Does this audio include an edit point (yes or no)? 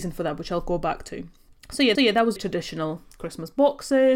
yes